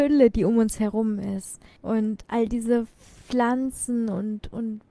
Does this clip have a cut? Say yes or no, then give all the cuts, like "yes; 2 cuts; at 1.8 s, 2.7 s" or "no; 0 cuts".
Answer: yes; 1 cut; at 1.8 s